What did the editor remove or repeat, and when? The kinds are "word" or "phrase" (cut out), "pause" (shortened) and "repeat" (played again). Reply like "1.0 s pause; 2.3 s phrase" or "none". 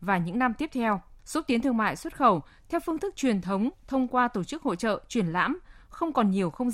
1.2 s pause